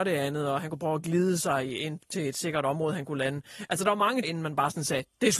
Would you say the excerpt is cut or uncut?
cut